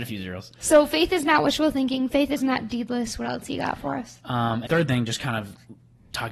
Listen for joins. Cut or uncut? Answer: cut